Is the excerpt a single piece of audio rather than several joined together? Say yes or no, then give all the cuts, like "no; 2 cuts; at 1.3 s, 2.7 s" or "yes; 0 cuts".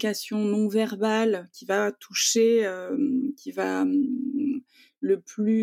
yes; 0 cuts